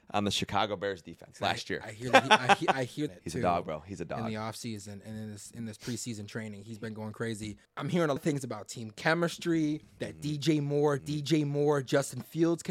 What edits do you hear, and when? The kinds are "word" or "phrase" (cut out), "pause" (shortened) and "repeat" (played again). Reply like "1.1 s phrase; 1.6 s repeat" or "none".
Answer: 3.1 s phrase; 7.6 s pause; 8.2 s word; 9.9 s pause; 11.0 s repeat

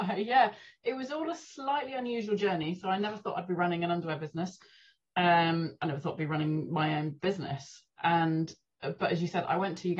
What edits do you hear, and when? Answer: none

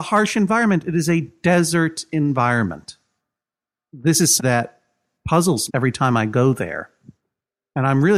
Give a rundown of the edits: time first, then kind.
4.4 s word; 5.7 s word

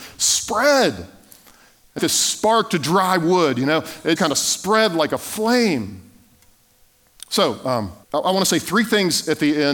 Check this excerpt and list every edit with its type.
2.0 s phrase; 4.2 s word; 8.0 s pause

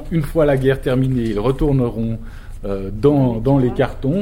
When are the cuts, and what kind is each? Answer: none

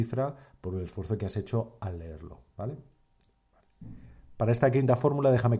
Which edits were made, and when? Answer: none

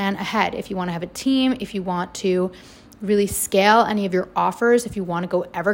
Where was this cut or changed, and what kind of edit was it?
none

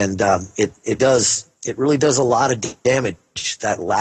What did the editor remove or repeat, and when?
1.0 s word

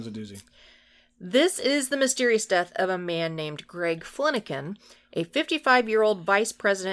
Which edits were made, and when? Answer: none

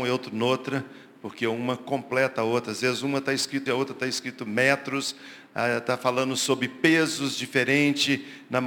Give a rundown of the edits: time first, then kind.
3.7 s word

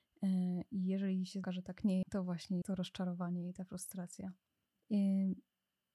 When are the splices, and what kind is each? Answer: 1.4 s phrase; 2.0 s word; 2.6 s word

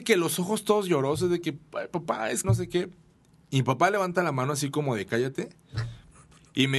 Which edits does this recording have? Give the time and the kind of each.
2.4 s word; 3.2 s pause

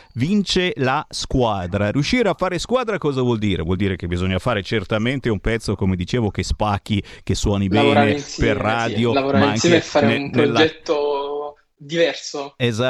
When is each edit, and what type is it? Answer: none

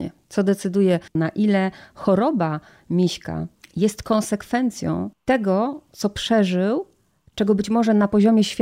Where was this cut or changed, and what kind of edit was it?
none

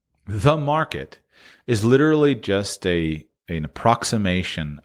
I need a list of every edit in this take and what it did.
none

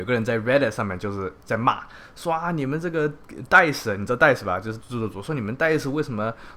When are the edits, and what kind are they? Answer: 4.8 s word

